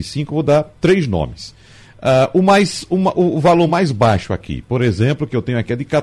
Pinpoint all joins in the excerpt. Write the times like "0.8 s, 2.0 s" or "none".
none